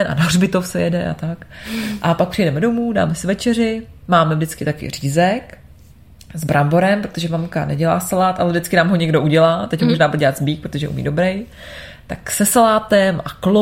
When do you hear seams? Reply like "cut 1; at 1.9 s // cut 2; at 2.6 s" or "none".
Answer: none